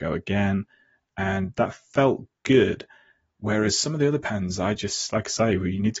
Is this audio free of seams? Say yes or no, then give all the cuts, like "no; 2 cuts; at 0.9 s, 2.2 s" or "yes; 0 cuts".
yes; 0 cuts